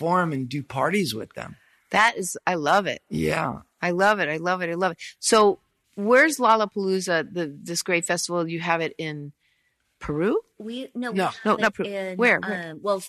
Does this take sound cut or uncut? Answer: uncut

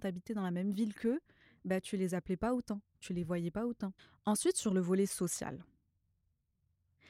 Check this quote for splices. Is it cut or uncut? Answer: uncut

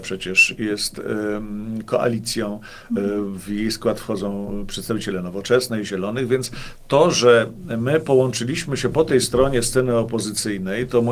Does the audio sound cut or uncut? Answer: uncut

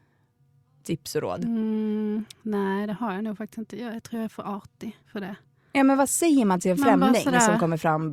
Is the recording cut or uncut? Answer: cut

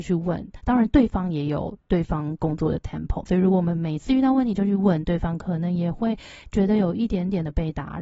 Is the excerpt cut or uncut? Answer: cut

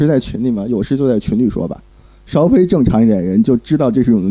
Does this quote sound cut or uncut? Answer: uncut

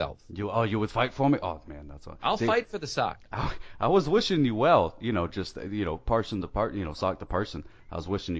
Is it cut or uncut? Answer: uncut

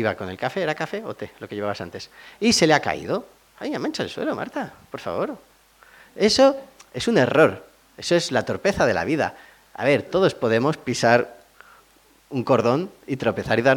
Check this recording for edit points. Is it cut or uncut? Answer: uncut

